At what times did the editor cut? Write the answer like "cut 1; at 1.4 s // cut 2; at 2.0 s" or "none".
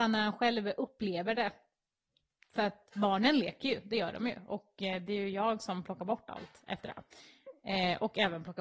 none